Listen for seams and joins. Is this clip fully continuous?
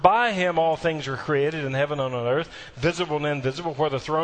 yes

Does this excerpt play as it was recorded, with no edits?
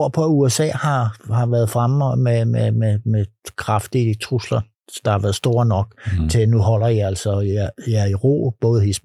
yes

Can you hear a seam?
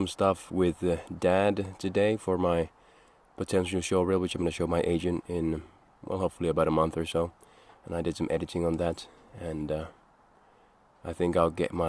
no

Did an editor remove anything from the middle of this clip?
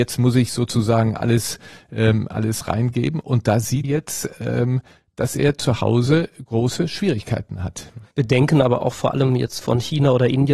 yes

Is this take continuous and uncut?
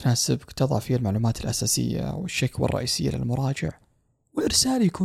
yes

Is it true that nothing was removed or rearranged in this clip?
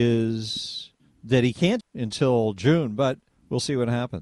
no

